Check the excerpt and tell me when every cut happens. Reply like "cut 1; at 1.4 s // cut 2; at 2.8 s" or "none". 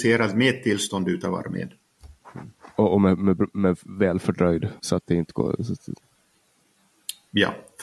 cut 1; at 4.8 s